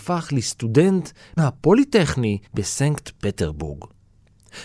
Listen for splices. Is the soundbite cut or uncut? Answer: cut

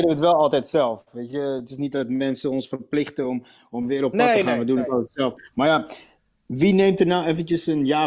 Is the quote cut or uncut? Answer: uncut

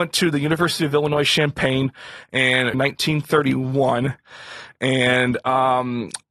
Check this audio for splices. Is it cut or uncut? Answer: cut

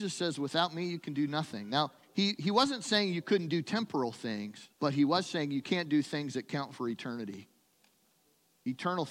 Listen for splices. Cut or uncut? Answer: cut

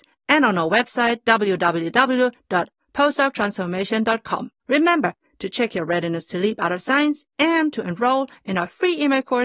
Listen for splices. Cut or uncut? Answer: cut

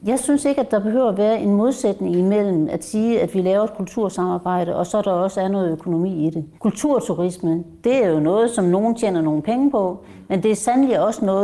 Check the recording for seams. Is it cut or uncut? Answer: cut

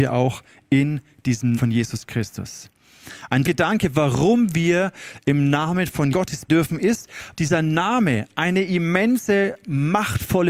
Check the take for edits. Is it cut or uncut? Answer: cut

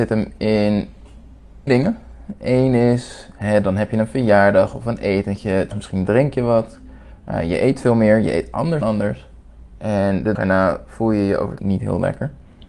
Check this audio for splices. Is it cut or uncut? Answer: cut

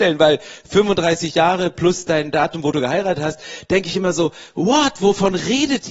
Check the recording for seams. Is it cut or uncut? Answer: uncut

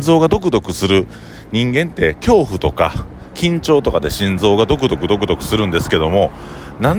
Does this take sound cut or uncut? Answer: uncut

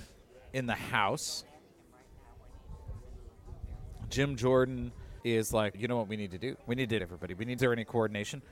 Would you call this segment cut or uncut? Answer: cut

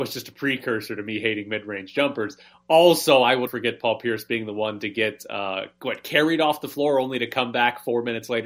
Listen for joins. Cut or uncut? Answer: cut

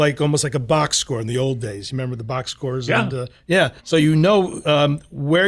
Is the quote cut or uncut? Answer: cut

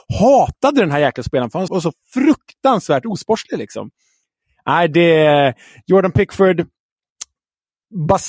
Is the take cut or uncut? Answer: cut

